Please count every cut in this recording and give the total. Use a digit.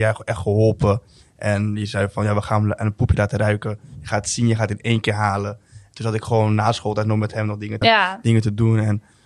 1